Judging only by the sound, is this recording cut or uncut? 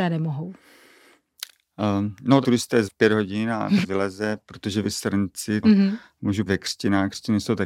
cut